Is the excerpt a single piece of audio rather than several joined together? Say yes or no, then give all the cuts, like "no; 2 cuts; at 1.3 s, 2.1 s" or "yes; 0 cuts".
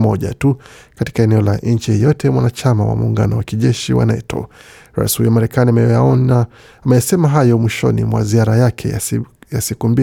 yes; 0 cuts